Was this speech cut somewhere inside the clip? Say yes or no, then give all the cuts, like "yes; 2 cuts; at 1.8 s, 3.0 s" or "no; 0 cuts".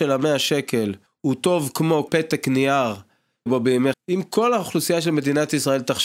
yes; 4 cuts; at 1.1 s, 2.1 s, 3.5 s, 3.9 s